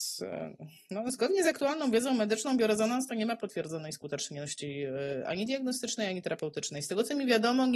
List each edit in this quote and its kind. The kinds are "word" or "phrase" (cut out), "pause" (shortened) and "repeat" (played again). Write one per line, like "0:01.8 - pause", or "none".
none